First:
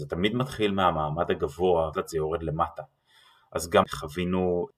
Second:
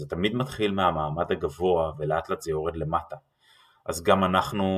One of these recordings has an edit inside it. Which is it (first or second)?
first